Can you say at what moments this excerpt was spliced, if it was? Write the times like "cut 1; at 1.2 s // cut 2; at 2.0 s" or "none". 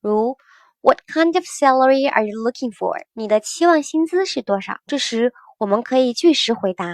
cut 1; at 3.1 s // cut 2; at 4.8 s